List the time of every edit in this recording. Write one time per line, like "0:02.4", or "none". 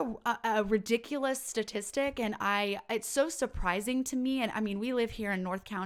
none